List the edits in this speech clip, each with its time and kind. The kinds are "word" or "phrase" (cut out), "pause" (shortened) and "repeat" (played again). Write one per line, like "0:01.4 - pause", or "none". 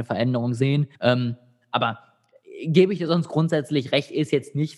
0:00.9 - pause